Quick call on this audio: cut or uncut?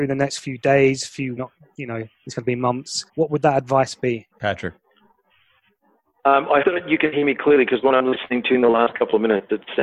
cut